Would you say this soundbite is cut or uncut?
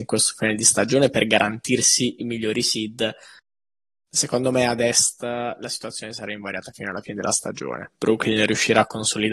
uncut